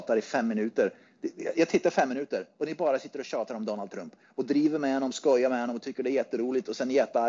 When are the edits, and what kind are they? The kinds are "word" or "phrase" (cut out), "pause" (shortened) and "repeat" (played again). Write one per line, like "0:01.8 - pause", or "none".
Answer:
none